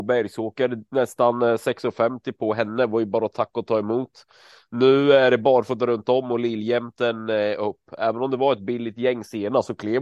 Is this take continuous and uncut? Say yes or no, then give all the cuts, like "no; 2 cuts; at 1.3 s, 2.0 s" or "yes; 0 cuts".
yes; 0 cuts